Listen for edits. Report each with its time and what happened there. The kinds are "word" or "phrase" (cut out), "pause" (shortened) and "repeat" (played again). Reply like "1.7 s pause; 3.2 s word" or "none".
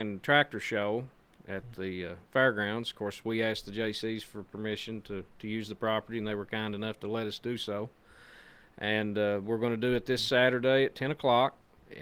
none

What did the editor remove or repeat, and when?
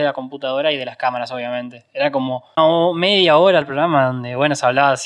2.6 s word; 3.6 s word

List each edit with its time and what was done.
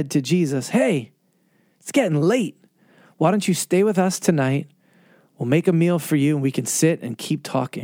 none

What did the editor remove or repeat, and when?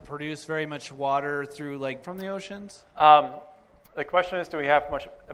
2.0 s word; 2.9 s pause

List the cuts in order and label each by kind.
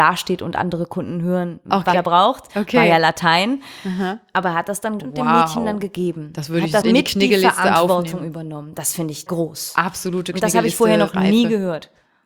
1.9 s word; 5.0 s word; 6.8 s word; 9.3 s word

